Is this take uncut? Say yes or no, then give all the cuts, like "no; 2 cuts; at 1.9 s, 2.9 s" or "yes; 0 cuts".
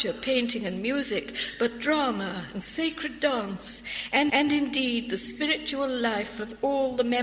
no; 1 cut; at 4.3 s